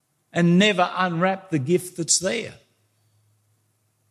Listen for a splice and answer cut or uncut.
uncut